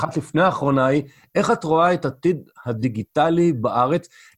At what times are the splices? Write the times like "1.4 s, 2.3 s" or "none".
none